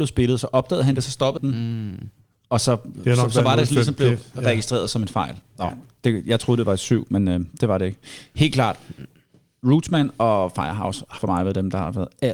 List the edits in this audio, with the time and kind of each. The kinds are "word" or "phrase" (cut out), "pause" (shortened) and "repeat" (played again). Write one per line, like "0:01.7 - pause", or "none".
0:01.4 - word
0:11.2 - word